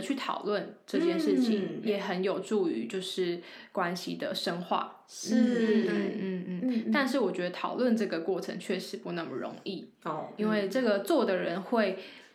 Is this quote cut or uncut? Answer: cut